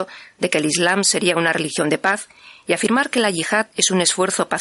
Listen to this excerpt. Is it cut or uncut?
uncut